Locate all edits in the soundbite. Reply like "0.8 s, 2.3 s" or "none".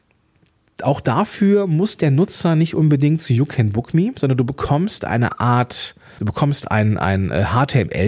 6.2 s